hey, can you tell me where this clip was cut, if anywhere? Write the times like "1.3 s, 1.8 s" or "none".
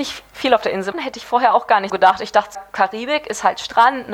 0.9 s, 1.9 s, 2.5 s